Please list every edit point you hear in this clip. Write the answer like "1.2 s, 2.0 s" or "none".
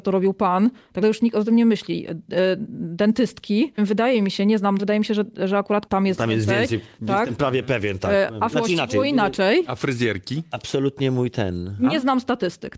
1.0 s, 3.8 s, 4.8 s, 5.9 s, 8.5 s